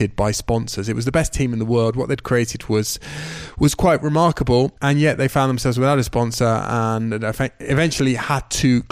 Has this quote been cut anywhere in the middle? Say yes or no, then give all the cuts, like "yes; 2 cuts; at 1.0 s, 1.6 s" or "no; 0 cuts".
yes; 1 cut; at 4.8 s